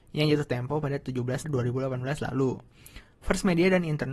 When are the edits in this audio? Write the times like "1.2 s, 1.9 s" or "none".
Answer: 1.4 s